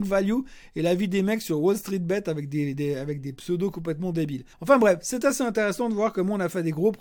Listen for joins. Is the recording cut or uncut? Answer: cut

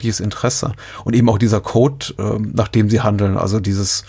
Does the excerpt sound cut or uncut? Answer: uncut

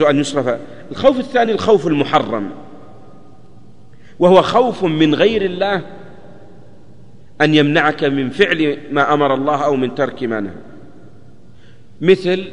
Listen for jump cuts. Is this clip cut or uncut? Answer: uncut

